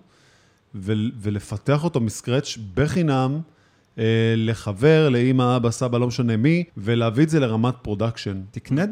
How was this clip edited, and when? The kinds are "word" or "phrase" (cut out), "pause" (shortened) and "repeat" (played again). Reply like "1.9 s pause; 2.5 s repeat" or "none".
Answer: 6.7 s pause